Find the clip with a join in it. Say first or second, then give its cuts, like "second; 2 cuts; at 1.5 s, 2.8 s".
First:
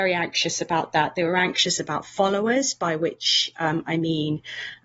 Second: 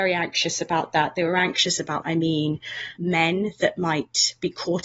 second; 2 cuts; at 2.0 s, 3.0 s